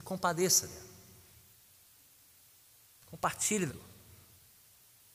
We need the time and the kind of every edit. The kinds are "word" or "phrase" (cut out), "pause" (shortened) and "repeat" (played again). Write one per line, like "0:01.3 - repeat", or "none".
0:03.7 - word